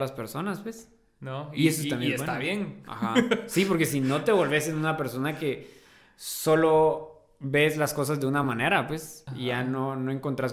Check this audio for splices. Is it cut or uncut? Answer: uncut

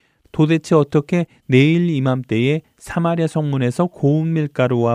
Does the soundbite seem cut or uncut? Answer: uncut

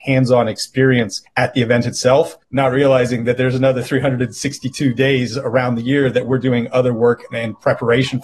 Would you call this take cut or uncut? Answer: cut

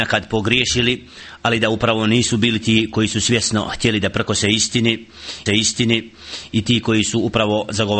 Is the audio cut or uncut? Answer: cut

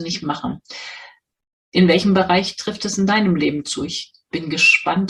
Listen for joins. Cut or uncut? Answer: uncut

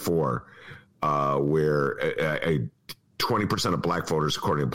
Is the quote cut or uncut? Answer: uncut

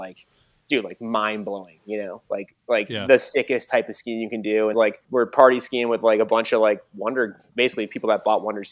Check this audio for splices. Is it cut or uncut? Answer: cut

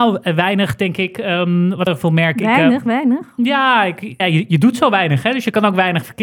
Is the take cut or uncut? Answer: cut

